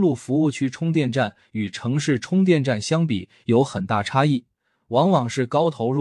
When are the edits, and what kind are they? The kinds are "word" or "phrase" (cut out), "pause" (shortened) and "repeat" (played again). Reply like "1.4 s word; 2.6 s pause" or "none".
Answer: none